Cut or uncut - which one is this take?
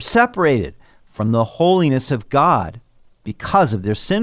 uncut